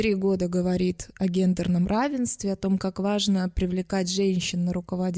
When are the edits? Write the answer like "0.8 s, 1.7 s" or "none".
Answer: none